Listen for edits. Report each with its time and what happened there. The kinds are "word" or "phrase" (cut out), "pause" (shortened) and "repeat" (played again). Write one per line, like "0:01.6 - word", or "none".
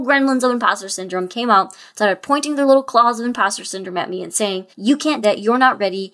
0:04.7 - pause
0:05.2 - word

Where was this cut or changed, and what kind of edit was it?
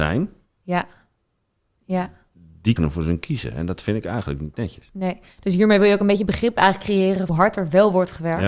0:02.8 - word
0:07.3 - phrase

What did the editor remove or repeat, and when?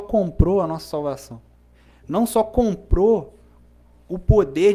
none

